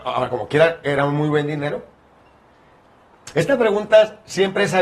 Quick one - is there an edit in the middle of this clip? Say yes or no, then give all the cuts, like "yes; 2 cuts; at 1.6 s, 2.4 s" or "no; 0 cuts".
no; 0 cuts